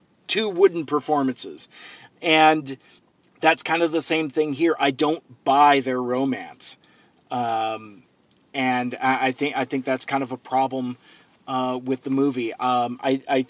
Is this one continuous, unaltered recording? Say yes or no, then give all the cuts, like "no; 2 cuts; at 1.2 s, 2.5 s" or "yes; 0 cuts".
yes; 0 cuts